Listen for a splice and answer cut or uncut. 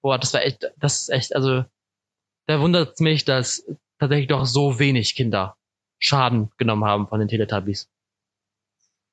uncut